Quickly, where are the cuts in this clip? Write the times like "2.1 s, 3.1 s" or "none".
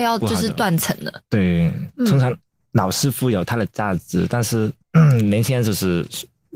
4.8 s